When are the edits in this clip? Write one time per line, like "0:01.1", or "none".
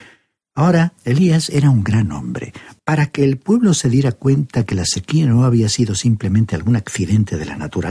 0:01.0